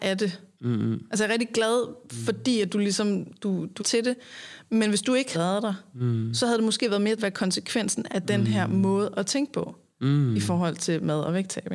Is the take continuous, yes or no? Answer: no